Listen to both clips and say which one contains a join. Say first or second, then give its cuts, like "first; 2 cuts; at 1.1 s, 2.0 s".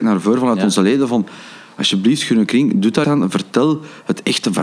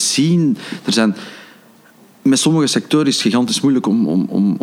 first; 1 cut; at 3.0 s